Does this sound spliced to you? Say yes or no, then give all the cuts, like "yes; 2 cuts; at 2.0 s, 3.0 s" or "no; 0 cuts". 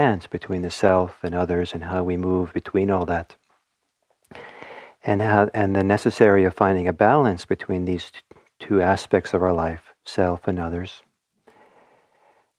yes; 1 cut; at 10.0 s